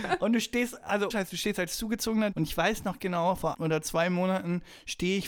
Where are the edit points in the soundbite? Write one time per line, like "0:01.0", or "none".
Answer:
0:01.1
0:02.3
0:03.0
0:03.5